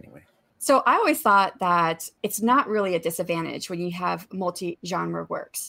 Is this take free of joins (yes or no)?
yes